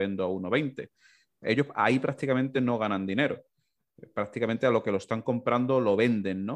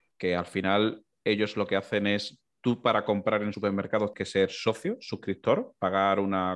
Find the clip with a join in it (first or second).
second